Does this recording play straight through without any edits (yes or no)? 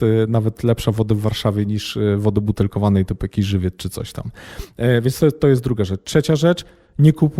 yes